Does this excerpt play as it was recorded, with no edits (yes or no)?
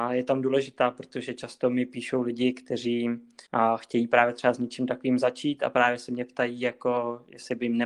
no